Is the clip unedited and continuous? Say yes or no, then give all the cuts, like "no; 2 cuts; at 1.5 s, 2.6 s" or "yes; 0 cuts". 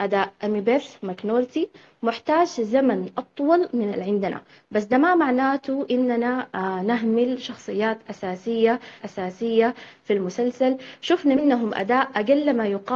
no; 2 cuts; at 3.9 s, 9.0 s